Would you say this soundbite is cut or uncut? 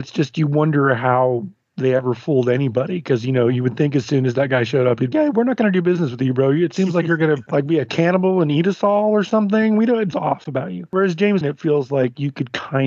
cut